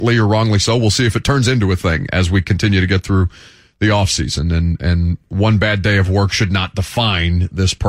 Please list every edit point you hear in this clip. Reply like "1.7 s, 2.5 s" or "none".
none